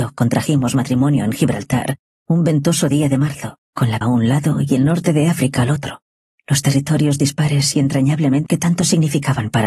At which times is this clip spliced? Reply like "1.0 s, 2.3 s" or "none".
3.6 s, 4.0 s, 8.5 s